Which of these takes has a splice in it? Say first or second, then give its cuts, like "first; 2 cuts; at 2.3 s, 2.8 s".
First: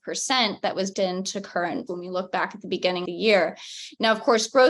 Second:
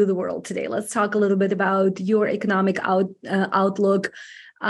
first; 3 cuts; at 0.9 s, 1.9 s, 3.1 s